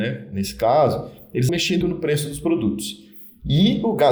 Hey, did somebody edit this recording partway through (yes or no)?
yes